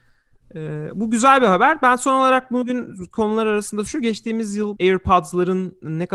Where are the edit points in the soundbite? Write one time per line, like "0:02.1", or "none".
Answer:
0:03.9
0:04.7